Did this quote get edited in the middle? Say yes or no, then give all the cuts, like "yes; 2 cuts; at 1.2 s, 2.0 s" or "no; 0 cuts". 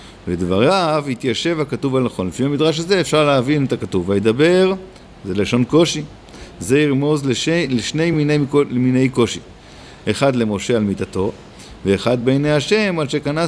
no; 0 cuts